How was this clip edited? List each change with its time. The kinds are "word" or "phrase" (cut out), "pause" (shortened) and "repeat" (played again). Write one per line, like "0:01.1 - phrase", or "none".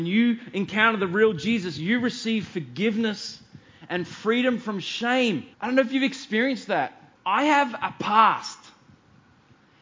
0:05.5 - pause
0:07.1 - pause